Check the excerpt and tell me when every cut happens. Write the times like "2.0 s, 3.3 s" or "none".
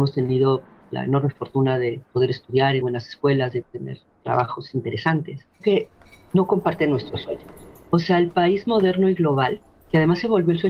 2.8 s, 3.6 s, 5.6 s